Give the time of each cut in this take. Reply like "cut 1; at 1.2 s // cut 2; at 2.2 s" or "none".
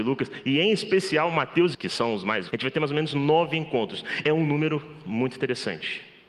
cut 1; at 1.7 s // cut 2; at 2.5 s // cut 3; at 4.2 s